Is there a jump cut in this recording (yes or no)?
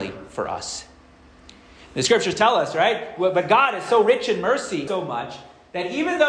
yes